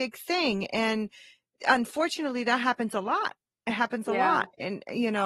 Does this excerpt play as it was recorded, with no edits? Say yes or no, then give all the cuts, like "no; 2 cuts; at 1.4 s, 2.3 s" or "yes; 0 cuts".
yes; 0 cuts